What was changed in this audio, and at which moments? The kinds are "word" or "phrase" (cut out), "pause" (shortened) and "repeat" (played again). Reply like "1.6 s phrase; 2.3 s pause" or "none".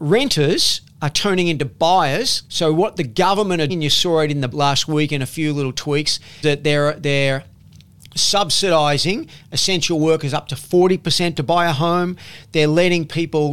2.5 s pause; 3.7 s word; 4.5 s word; 6.4 s word